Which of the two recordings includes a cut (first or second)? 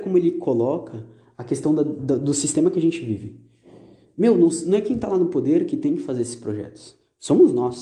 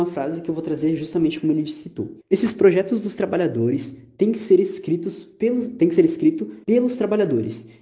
second